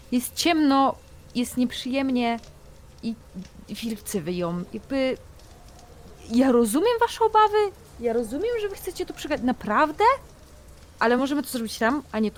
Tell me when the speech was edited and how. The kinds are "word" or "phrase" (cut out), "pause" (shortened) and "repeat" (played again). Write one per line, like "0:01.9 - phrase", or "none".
none

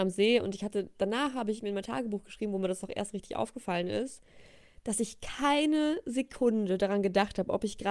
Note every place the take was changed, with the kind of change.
none

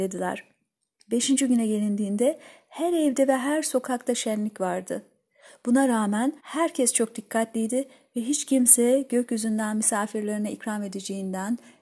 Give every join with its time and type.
0:06.4 - pause

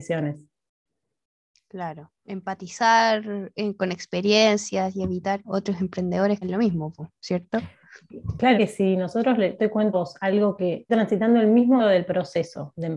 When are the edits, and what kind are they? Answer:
0:02.2 - word
0:05.4 - word
0:06.4 - word
0:08.6 - word
0:09.6 - word
0:09.9 - word
0:10.9 - word
0:11.8 - word

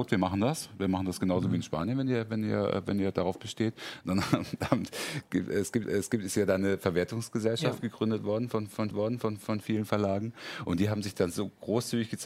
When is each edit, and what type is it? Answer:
0:05.8 - repeat
0:08.9 - repeat

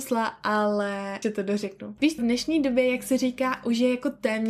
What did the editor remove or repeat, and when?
0:01.2 - word
0:02.2 - word

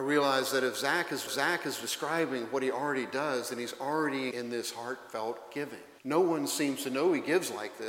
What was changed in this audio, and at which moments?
0:01.3 - repeat
0:04.3 - word
0:06.0 - pause

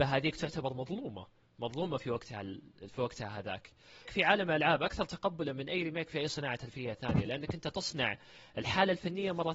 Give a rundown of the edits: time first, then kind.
0:04.1 - word

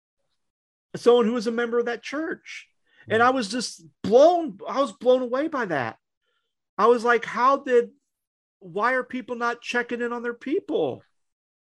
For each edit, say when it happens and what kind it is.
none

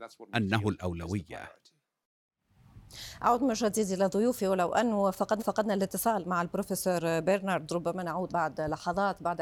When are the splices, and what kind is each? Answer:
0:05.4 - repeat
0:08.3 - word

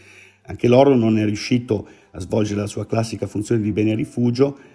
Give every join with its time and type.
none

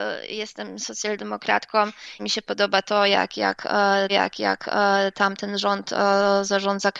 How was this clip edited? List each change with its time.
0:02.2 - phrase
0:04.1 - repeat

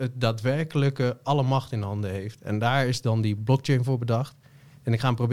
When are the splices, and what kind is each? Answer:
none

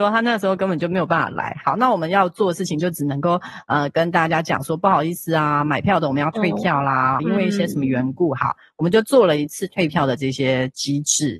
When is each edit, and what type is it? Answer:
0:07.2 - word

